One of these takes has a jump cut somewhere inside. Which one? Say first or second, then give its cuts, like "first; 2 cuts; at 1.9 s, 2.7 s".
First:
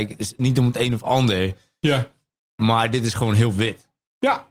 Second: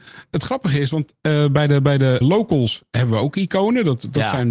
second; 1 cut; at 2.2 s